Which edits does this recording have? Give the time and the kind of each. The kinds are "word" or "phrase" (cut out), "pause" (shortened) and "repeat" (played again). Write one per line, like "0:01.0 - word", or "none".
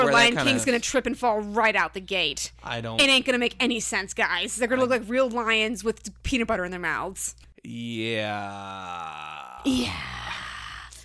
none